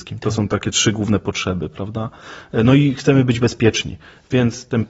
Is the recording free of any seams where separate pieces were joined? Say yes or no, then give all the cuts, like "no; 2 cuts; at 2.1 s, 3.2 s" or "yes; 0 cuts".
yes; 0 cuts